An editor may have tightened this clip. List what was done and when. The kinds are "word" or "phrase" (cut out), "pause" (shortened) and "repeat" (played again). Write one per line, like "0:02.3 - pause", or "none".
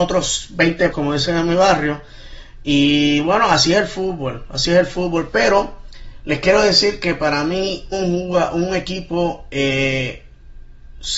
0:00.9 - word
0:07.9 - word